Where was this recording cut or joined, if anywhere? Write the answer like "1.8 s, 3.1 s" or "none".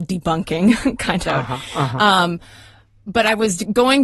1.3 s